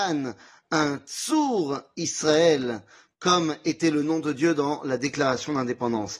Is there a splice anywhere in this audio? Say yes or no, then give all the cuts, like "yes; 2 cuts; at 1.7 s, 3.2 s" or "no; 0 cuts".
no; 0 cuts